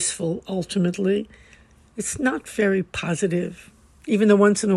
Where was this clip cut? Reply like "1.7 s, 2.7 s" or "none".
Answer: none